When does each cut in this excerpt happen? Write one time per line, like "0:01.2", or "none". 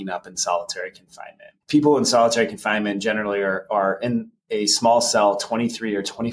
0:01.6